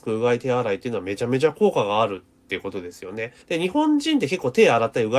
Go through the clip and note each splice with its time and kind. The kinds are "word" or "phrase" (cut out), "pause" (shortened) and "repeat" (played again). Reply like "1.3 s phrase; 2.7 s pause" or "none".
3.4 s pause